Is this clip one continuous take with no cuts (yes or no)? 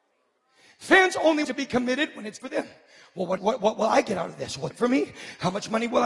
no